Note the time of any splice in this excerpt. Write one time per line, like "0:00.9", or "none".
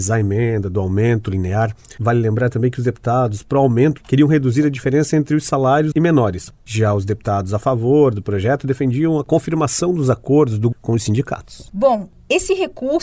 0:02.0
0:04.0
0:05.9
0:10.7

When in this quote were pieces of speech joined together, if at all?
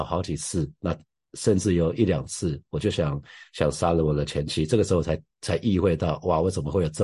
none

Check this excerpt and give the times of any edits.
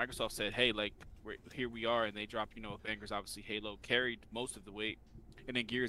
0:02.8

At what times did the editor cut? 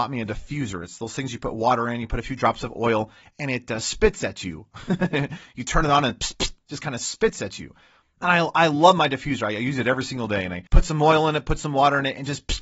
0:06.3
0:10.7

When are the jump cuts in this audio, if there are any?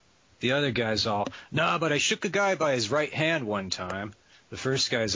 none

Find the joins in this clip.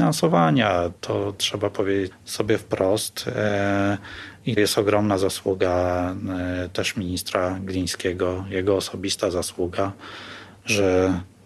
0:02.1
0:04.6

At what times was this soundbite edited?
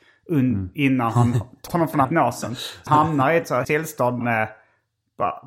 0:01.7
0:02.0
0:02.9
0:03.6
0:04.2

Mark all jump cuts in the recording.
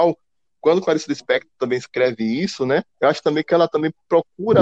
0:02.9

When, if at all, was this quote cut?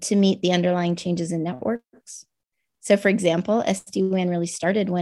none

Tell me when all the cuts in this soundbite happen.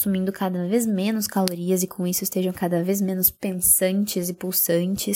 none

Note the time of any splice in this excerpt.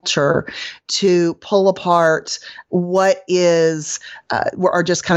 none

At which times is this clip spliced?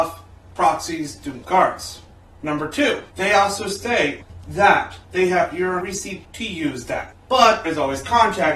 0:01.4
0:03.1
0:05.0
0:05.8
0:06.2
0:07.6

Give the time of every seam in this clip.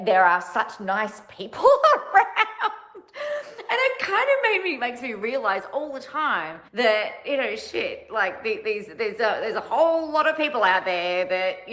0:06.7

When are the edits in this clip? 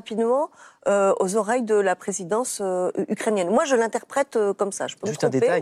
none

